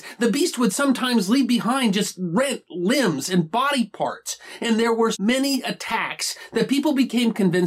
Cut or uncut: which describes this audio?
cut